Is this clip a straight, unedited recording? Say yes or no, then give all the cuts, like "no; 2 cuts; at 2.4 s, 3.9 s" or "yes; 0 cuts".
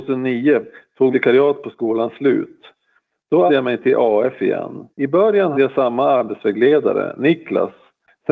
no; 4 cuts; at 1.1 s, 3.5 s, 4.9 s, 5.5 s